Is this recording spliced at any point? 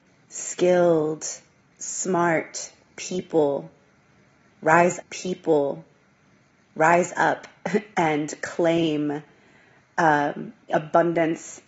yes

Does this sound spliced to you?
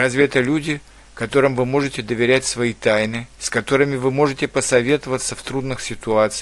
yes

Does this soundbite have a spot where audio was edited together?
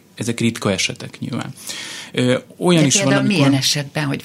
no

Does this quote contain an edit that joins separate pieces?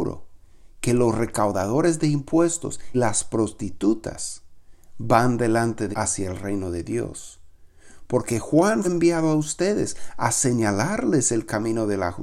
yes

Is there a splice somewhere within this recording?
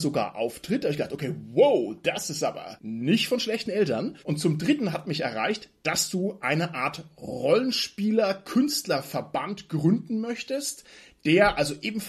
yes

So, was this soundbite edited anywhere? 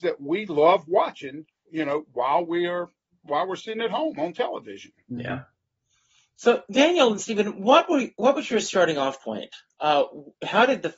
no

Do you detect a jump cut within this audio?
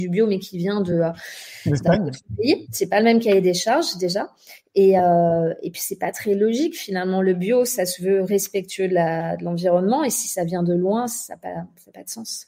no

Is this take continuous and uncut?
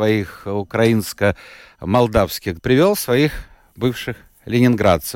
no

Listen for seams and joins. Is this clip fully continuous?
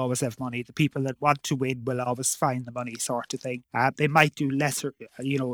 no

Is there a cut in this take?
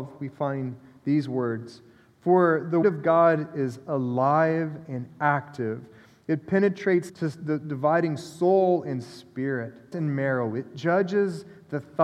yes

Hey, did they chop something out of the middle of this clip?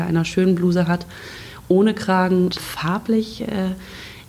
yes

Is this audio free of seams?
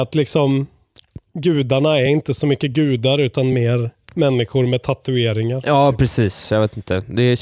yes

